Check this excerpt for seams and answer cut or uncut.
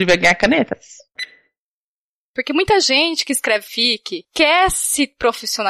uncut